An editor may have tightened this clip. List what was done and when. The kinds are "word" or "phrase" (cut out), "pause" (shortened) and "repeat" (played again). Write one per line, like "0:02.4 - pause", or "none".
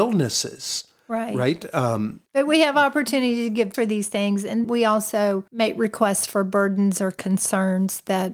0:02.3 - pause
0:03.7 - word
0:04.6 - word
0:05.5 - pause